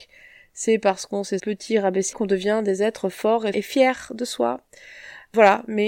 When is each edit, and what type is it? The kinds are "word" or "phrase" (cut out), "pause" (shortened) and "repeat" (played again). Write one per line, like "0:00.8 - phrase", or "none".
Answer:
0:01.4 - word
0:02.1 - word